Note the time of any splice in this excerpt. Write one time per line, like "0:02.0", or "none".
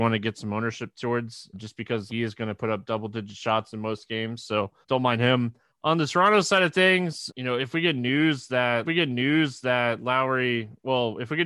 0:01.5
0:02.1
0:04.8
0:05.7
0:07.3
0:08.9